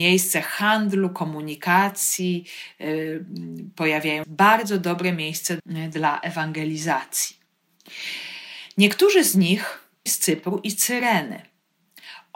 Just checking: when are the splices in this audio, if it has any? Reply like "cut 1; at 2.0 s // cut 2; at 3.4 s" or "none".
cut 1; at 4.2 s // cut 2; at 5.6 s // cut 3; at 10.1 s